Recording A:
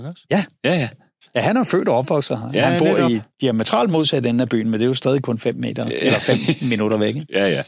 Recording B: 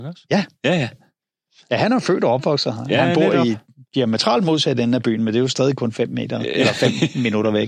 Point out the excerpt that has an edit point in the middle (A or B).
A